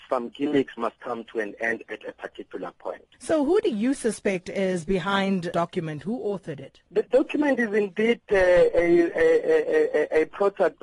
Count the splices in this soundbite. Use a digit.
4